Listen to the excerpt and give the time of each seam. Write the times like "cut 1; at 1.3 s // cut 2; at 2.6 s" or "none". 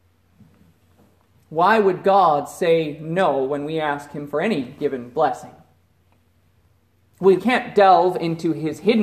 cut 1; at 7.4 s